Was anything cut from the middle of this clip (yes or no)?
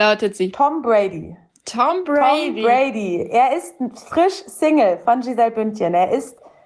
no